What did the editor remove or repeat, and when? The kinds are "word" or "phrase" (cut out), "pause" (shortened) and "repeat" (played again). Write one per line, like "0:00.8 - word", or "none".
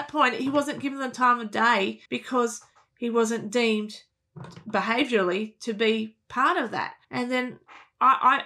0:02.1 - pause
0:07.0 - pause